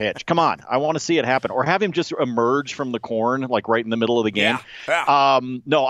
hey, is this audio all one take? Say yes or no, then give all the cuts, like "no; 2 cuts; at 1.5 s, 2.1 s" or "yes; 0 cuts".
yes; 0 cuts